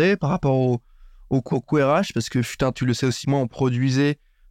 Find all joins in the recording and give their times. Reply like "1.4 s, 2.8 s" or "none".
1.5 s, 2.7 s, 3.2 s